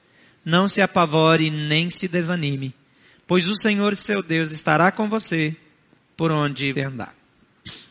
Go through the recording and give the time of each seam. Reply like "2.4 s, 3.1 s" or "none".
6.7 s